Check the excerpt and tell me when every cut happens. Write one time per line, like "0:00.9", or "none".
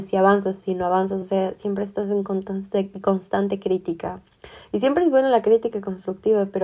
none